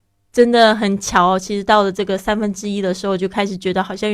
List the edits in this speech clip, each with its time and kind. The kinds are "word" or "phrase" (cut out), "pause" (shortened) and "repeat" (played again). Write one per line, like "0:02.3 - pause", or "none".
none